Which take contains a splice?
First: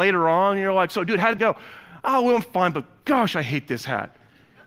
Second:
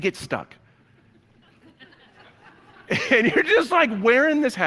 first; 1 cut; at 1.4 s

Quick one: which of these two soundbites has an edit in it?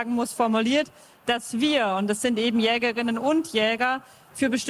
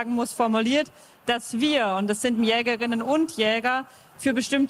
second; 1 cut; at 2.4 s

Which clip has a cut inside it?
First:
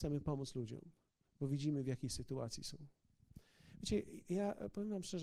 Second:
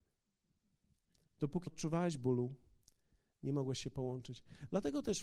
second; 1 cut; at 1.7 s

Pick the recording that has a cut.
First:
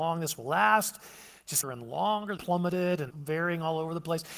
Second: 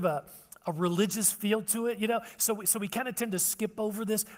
first; 3 cuts; at 1.6 s, 2.4 s, 3.1 s

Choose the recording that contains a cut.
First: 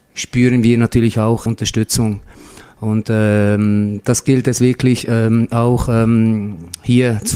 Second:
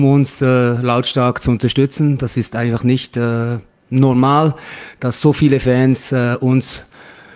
first; 1 cut; at 1.5 s

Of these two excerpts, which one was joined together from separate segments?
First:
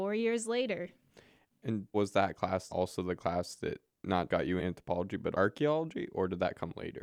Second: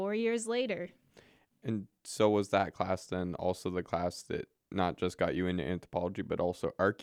first; 5 cuts; at 1.9 s, 2.7 s, 4.3 s, 4.6 s, 5.3 s

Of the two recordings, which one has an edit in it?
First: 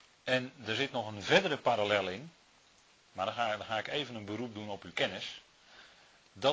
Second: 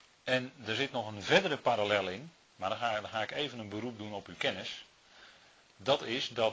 second; 1 cut; at 2.4 s

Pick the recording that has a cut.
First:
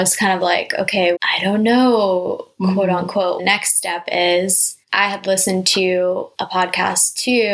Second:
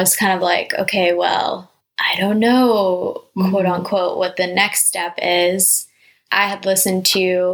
first; 4 cuts; at 1.2 s, 3.4 s, 4.8 s, 6.3 s

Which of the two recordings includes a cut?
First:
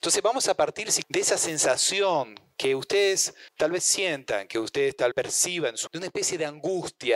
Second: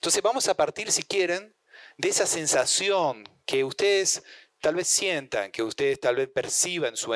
first; 4 cuts; at 1.0 s, 3.5 s, 5.1 s, 5.9 s

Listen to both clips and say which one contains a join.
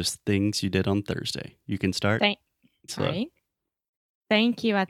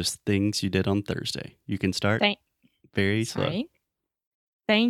first; 1 cut; at 2.9 s

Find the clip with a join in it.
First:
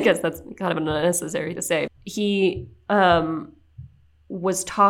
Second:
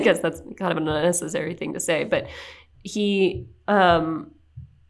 first; 2 cuts; at 1.6 s, 1.9 s

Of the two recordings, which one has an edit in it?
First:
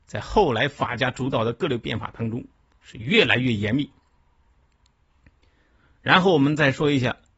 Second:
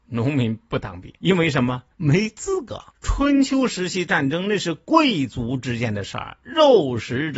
second; 3 cuts; at 1.2 s, 1.9 s, 2.9 s

